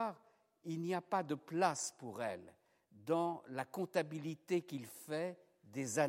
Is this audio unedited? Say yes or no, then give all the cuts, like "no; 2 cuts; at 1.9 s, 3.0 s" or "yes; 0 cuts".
yes; 0 cuts